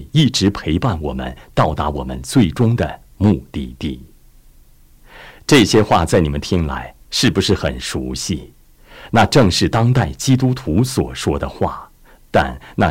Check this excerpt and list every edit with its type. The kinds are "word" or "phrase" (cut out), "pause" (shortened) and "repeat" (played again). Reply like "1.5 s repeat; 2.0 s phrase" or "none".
none